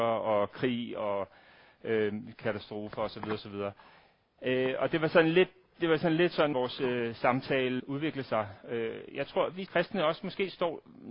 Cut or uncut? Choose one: cut